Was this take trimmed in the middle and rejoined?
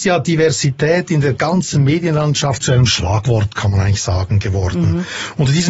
no; 0 cuts

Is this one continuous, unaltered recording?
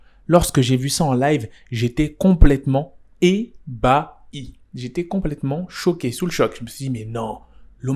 yes; 0 cuts

